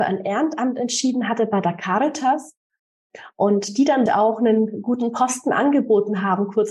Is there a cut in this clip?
yes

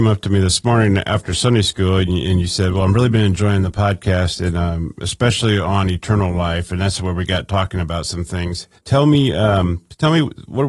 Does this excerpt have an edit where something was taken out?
yes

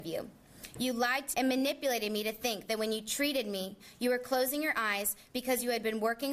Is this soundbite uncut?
no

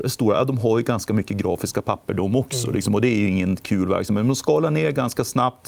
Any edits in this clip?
no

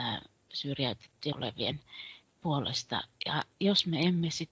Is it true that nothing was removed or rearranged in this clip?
no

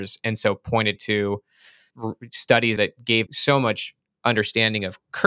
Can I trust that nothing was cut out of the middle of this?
no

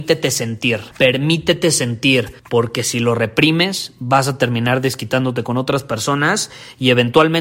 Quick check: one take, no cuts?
no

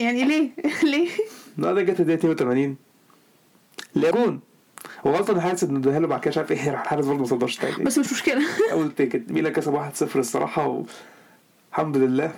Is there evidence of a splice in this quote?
yes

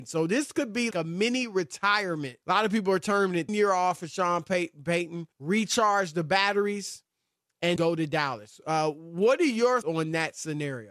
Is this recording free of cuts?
no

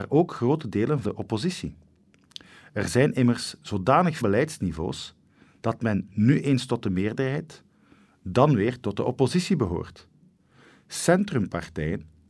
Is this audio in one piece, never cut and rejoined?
no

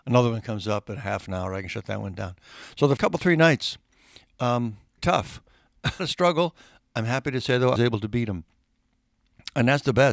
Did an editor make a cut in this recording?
yes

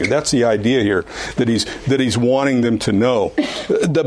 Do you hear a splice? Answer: no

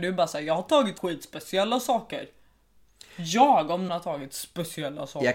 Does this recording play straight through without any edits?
no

